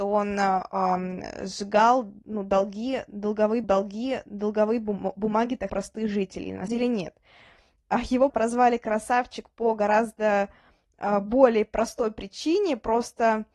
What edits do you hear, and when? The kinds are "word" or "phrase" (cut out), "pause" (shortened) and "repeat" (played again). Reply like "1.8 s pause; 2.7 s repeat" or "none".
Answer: 3.6 s repeat; 5.7 s word; 6.7 s word; 8.3 s word